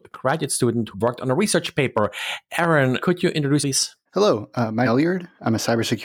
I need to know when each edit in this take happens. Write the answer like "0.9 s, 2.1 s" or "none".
0.9 s, 3.0 s, 3.6 s, 4.1 s, 4.8 s